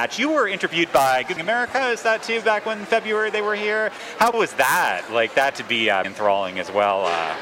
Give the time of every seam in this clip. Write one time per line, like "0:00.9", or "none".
0:01.4
0:02.2
0:04.3
0:05.5
0:06.0